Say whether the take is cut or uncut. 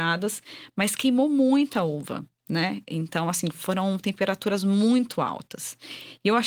uncut